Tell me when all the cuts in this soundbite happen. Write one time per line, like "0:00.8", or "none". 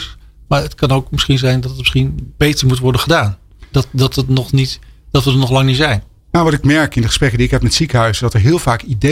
none

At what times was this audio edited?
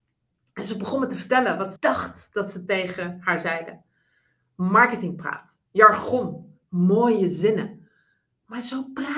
0:01.8
0:05.7

